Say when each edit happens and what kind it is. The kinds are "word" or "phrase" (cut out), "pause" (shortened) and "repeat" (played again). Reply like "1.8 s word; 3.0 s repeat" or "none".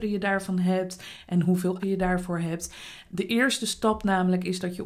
1.8 s word